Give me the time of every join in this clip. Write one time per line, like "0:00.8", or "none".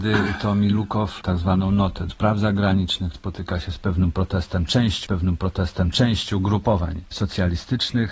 0:01.2
0:02.1
0:03.1
0:05.0